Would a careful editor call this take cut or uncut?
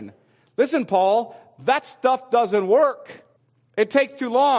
cut